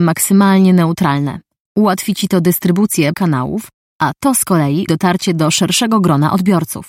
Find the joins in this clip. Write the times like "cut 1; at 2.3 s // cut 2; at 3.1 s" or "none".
cut 1; at 3.1 s // cut 2; at 4.9 s